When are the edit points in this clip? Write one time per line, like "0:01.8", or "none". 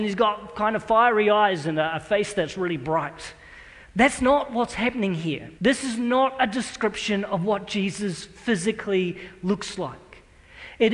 0:05.6

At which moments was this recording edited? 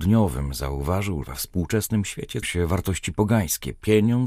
0:01.2
0:02.4

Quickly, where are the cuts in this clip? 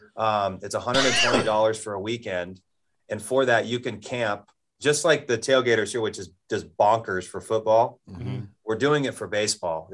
none

